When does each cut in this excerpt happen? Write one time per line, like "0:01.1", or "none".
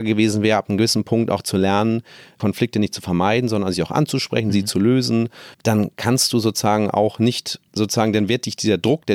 0:05.5